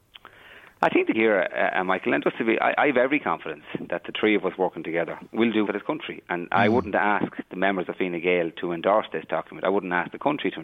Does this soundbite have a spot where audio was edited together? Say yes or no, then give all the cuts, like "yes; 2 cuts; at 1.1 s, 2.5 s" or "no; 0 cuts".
yes; 2 cuts; at 1.1 s, 5.7 s